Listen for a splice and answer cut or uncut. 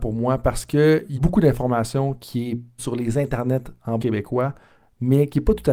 cut